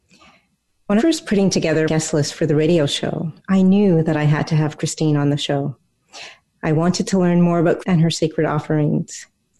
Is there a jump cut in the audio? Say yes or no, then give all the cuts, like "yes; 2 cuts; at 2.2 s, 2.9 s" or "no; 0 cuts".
yes; 4 cuts; at 1.0 s, 1.9 s, 3.4 s, 7.8 s